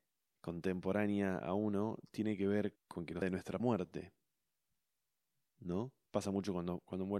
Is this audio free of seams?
no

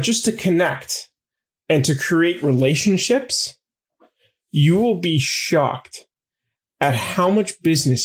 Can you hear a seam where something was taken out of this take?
no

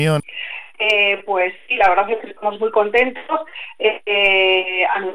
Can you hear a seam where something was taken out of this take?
no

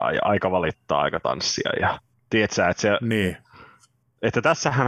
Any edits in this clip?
no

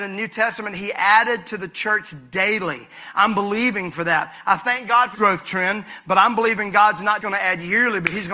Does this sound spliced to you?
yes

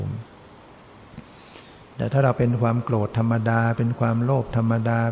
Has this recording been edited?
yes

